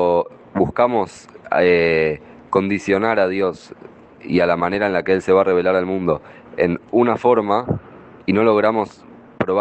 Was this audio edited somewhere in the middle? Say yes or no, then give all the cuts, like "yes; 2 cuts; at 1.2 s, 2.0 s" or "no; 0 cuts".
no; 0 cuts